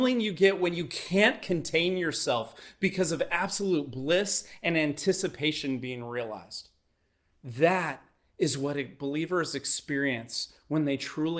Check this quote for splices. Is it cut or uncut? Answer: uncut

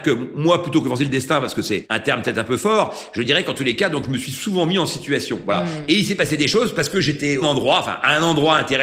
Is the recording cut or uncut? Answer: cut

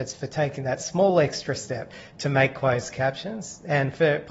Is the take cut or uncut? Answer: uncut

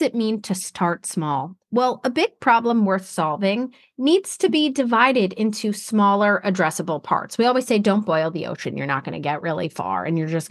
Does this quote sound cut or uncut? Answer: uncut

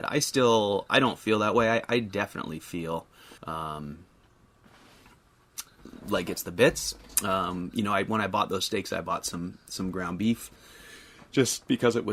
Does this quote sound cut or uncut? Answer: cut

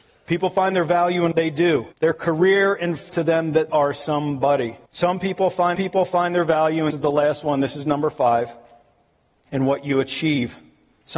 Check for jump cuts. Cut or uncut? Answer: cut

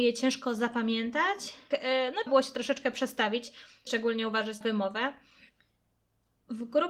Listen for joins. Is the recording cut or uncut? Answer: cut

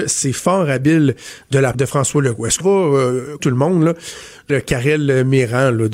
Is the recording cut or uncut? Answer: cut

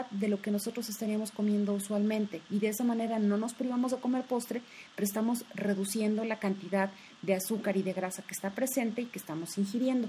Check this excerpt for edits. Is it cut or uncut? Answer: uncut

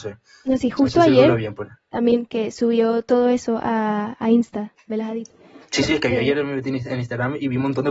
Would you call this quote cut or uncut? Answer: uncut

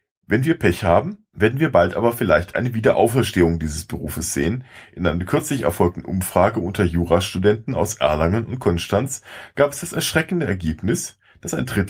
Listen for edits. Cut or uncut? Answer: cut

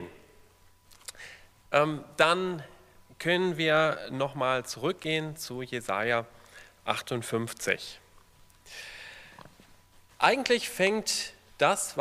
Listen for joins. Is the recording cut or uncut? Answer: uncut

